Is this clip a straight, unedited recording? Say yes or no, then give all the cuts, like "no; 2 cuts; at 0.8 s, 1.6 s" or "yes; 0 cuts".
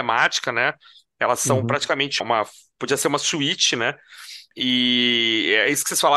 no; 1 cut; at 2.2 s